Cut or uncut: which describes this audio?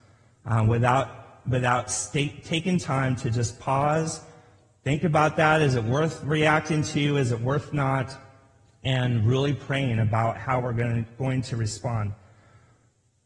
uncut